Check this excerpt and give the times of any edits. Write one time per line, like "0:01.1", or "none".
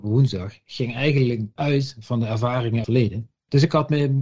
0:02.8